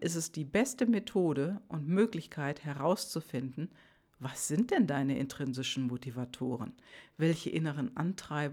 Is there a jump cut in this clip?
no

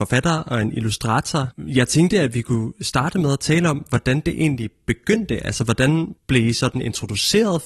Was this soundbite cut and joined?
yes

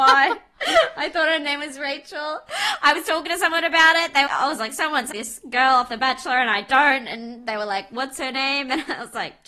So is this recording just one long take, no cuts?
no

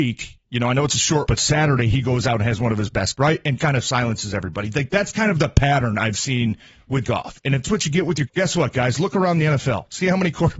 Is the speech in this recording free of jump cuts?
no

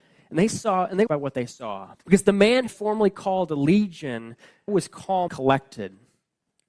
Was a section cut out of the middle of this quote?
yes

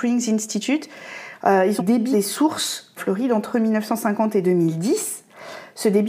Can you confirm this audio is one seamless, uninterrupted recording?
no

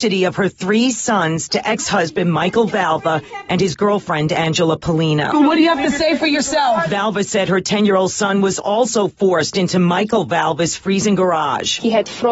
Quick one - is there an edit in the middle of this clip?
no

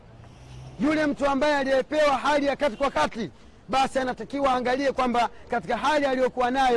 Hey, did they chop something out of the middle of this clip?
no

